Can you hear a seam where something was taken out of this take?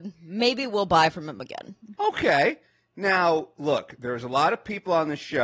no; 0 cuts

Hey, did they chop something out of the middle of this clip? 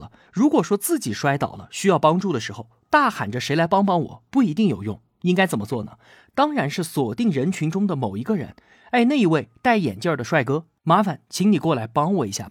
no; 0 cuts

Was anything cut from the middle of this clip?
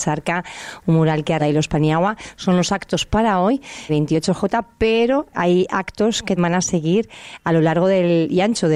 yes; 4 cuts; at 1.4 s, 3.9 s, 5.3 s, 6.4 s

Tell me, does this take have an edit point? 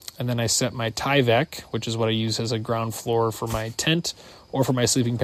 no; 0 cuts

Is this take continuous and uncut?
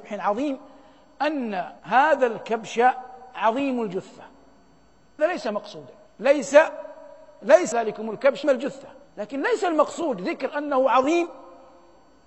no; 6 cuts; at 1.8 s, 5.2 s, 6.1 s, 7.7 s, 8.4 s, 9.0 s

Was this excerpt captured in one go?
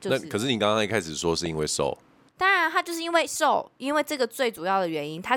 yes; 0 cuts

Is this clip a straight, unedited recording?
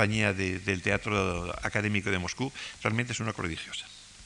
no; 1 cut; at 3.3 s

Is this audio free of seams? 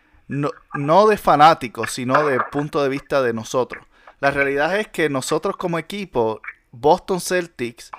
yes; 0 cuts

